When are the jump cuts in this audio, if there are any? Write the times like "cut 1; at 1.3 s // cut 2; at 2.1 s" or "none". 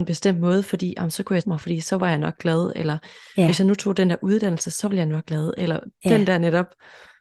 cut 1; at 1.4 s // cut 2; at 5.2 s